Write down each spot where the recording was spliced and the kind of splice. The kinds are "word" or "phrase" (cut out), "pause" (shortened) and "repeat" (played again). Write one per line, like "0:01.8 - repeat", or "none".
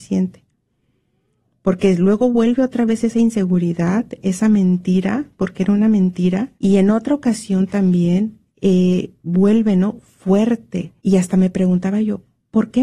0:06.5 - pause
0:08.5 - pause
0:11.0 - pause